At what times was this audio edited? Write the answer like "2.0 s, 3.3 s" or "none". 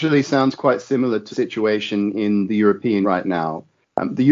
1.3 s, 3.0 s